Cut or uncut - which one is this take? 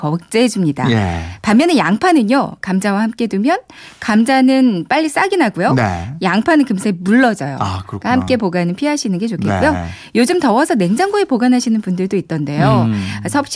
uncut